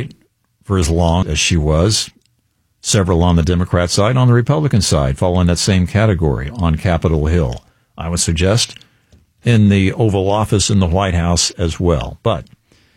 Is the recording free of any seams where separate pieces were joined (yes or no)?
no